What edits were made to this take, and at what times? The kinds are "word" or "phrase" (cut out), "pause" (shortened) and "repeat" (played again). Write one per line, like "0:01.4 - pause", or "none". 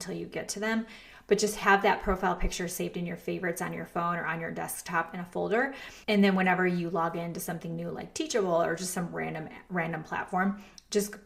0:06.0 - pause